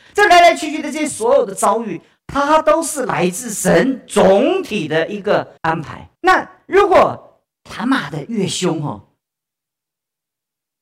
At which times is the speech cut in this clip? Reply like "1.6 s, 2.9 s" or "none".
5.6 s, 6.1 s, 7.5 s